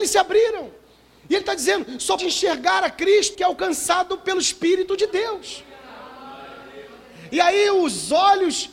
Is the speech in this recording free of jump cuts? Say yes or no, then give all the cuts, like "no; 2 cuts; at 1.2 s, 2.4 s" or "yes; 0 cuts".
no; 2 cuts; at 2.2 s, 3.3 s